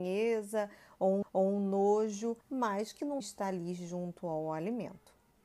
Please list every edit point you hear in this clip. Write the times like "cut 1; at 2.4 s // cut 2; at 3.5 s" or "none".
cut 1; at 1.2 s // cut 2; at 2.4 s // cut 3; at 3.2 s